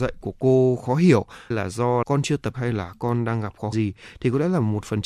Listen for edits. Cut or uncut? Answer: cut